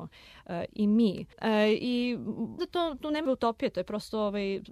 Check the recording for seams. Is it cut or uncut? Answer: cut